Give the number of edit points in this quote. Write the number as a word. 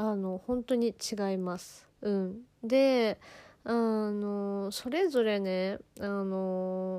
one